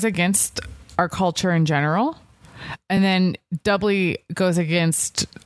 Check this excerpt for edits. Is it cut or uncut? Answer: uncut